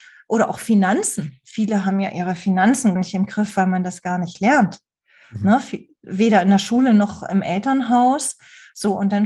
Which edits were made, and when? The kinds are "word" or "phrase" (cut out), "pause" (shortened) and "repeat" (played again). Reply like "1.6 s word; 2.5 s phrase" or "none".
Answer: 3.0 s word